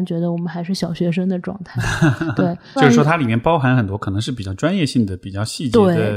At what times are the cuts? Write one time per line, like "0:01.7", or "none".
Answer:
0:02.8